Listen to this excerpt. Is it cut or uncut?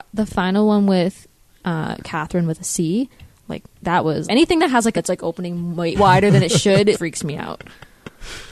cut